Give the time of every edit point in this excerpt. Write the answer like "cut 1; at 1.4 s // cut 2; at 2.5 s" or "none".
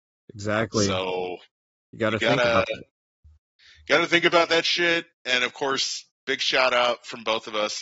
none